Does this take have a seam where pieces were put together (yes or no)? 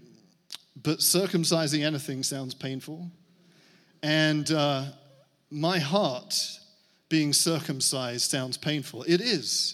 no